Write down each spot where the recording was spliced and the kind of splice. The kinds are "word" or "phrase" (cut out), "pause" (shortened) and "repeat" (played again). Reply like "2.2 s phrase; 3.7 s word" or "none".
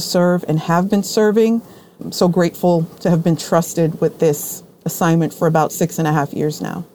none